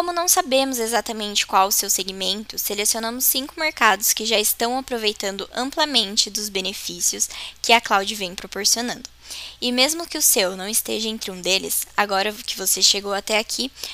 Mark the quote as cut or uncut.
uncut